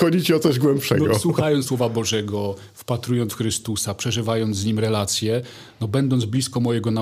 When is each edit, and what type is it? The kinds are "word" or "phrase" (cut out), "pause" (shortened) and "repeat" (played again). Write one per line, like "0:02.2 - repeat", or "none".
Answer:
0:01.7 - word
0:03.3 - word